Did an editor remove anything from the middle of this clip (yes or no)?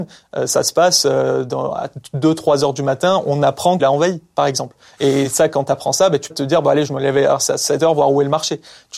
yes